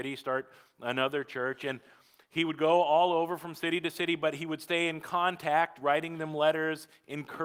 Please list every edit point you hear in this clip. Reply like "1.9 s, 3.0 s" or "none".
none

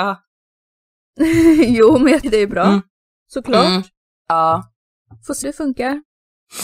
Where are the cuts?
2.2 s, 5.4 s

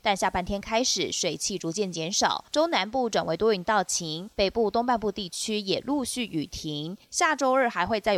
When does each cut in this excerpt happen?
2.5 s, 4.3 s, 7.0 s

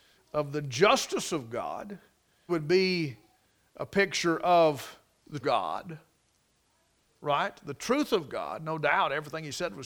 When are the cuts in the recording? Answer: 2.5 s, 5.4 s

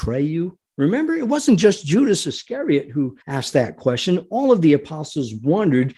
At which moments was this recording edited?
3.2 s

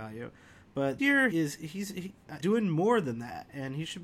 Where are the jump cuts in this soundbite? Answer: 1.0 s, 1.3 s, 2.4 s

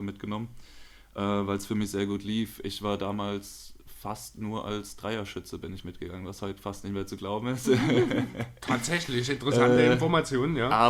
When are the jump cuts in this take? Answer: none

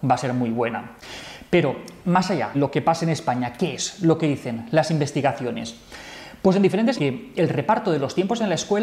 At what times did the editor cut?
2.5 s, 6.9 s

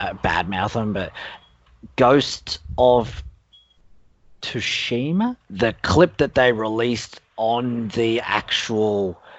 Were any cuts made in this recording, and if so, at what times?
none

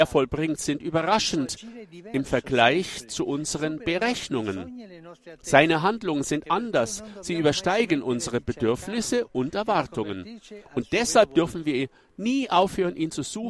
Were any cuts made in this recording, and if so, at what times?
none

